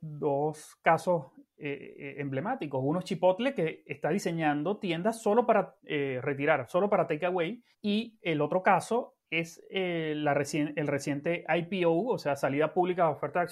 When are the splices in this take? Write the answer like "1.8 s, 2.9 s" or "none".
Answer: 5.8 s, 7.7 s, 9.2 s